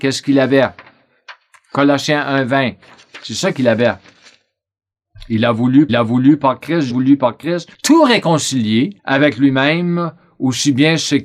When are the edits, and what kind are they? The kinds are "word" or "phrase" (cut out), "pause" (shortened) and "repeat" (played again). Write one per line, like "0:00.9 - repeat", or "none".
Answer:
0:05.9 - repeat
0:06.9 - phrase
0:07.7 - pause
0:09.0 - pause

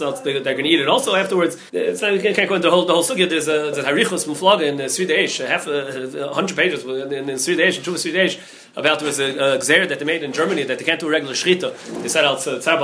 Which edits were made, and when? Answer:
0:01.7 - pause

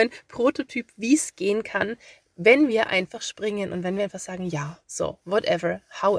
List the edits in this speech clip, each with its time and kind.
none

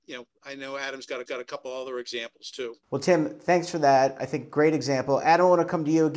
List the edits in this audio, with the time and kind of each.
0:01.3 - repeat
0:02.8 - pause

